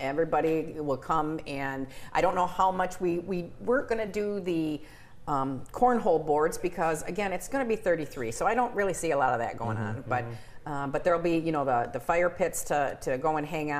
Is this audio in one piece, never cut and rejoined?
yes; 0 cuts

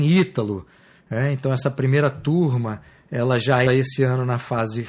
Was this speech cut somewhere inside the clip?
yes; 1 cut; at 3.7 s

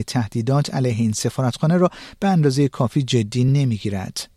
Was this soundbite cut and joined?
no; 0 cuts

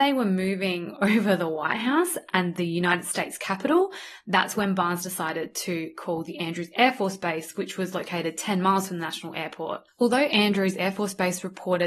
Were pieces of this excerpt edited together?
no; 0 cuts

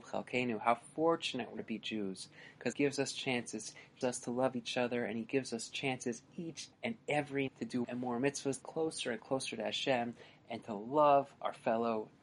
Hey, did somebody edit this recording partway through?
yes; 7 cuts; at 1.6 s, 2.7 s, 4.0 s, 6.7 s, 7.5 s, 7.8 s, 8.6 s

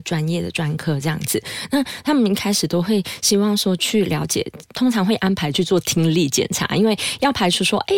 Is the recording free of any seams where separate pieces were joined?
no; 1 cut; at 4.7 s

